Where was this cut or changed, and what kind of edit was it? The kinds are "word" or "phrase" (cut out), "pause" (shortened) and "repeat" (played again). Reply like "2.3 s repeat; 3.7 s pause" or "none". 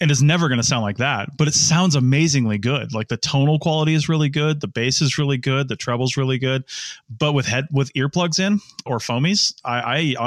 none